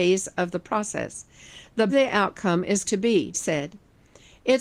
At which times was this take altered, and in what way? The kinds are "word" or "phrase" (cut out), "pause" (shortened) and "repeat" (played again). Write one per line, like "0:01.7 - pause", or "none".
0:01.9 - word
0:02.8 - word
0:03.3 - word